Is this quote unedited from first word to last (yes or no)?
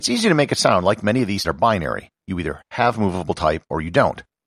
no